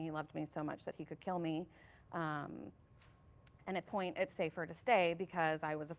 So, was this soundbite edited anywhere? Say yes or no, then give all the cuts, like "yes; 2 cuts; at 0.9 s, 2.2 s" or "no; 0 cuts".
yes; 2 cuts; at 3.8 s, 4.3 s